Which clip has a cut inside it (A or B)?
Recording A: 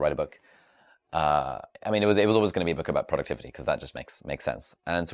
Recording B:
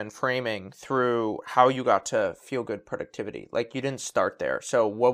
A